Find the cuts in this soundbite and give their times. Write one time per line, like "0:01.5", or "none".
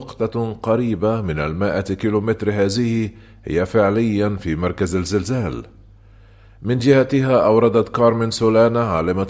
none